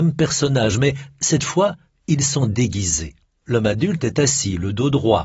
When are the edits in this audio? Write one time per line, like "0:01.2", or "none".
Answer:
none